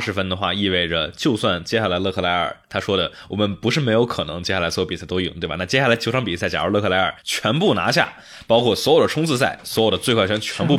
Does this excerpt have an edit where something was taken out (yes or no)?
yes